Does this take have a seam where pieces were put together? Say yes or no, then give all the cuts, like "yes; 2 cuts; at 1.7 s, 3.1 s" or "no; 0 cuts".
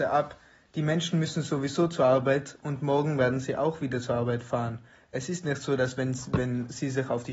no; 0 cuts